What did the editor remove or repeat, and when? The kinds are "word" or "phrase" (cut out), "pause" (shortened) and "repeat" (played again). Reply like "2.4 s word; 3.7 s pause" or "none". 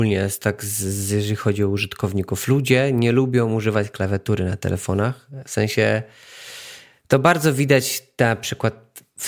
none